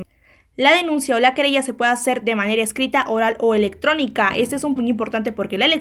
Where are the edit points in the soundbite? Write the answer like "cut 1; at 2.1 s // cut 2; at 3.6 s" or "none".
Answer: cut 1; at 4.8 s